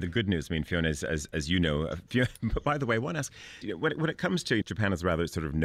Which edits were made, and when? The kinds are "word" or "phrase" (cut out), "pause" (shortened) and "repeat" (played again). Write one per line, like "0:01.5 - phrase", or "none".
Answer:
0:03.6 - word
0:04.6 - word